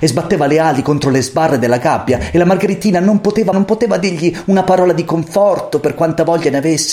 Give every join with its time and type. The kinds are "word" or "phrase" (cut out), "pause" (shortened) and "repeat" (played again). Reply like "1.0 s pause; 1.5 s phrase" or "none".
3.5 s word